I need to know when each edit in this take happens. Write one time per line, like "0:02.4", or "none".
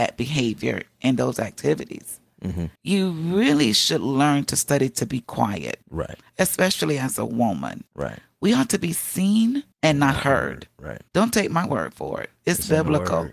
0:02.8
0:05.8
0:07.9
0:09.7
0:11.1